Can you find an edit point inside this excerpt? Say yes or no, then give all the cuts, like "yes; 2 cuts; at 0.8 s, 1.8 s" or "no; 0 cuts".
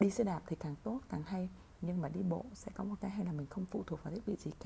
no; 0 cuts